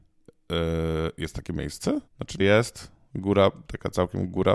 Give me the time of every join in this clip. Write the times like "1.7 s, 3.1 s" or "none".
2.1 s, 2.4 s